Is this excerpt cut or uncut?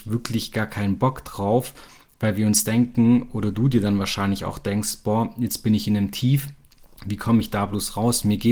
uncut